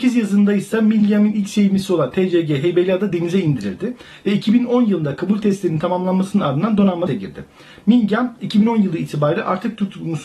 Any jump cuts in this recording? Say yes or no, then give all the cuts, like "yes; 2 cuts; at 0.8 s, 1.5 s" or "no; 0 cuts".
yes; 1 cut; at 7.1 s